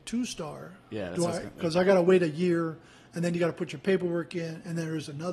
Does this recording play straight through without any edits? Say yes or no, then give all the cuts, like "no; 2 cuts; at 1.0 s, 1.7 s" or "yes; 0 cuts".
yes; 0 cuts